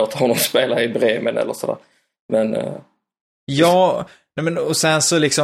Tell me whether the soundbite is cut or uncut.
uncut